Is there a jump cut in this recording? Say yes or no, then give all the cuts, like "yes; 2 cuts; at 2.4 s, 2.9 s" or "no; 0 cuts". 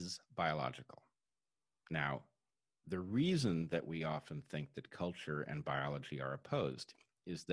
no; 0 cuts